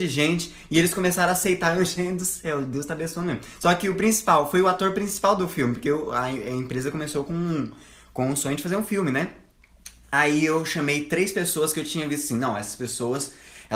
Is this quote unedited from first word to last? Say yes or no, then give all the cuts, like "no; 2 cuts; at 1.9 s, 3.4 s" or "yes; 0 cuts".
yes; 0 cuts